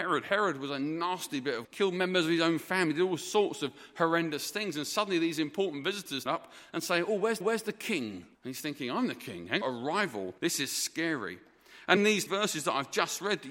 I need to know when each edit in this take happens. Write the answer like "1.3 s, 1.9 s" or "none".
1.6 s, 6.3 s, 7.4 s, 8.3 s, 9.6 s, 10.4 s, 12.0 s, 12.3 s